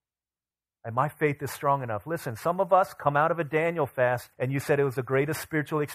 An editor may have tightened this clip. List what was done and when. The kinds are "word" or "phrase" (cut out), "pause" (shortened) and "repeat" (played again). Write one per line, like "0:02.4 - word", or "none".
0:04.3 - pause